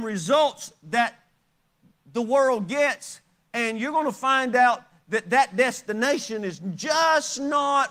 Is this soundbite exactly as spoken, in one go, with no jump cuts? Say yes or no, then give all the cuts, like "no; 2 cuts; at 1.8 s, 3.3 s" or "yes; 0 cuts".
yes; 0 cuts